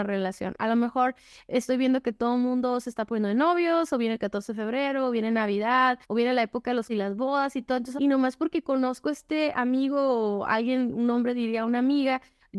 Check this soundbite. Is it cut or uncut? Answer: cut